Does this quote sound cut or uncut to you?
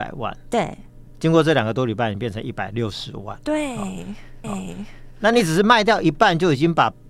cut